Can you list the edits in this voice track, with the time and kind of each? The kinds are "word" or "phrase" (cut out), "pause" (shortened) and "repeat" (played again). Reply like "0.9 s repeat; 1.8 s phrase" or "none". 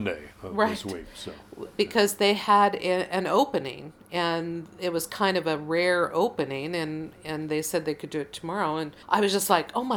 9.0 s pause

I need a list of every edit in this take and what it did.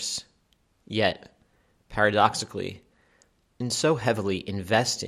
none

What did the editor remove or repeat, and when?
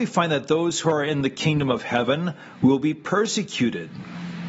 none

